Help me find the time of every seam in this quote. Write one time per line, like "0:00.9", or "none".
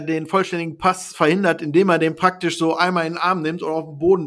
none